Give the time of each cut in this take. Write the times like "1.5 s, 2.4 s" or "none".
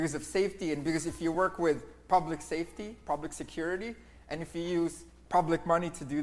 none